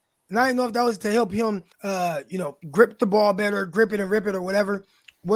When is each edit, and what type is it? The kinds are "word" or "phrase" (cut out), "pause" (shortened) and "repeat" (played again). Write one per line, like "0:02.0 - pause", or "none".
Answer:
0:01.7 - pause
0:02.6 - pause